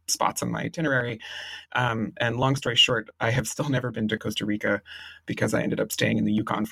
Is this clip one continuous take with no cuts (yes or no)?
yes